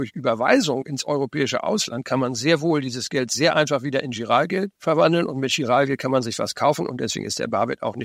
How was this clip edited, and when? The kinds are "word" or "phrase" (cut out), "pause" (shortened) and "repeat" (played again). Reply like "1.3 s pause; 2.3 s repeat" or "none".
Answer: 4.7 s pause